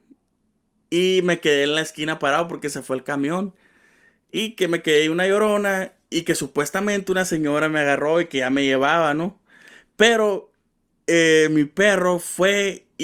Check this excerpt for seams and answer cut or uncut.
uncut